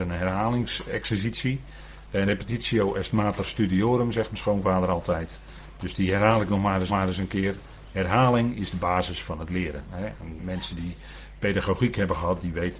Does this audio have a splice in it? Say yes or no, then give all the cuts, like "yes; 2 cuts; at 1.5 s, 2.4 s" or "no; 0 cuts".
yes; 3 cuts; at 2.3 s, 6.9 s, 10.4 s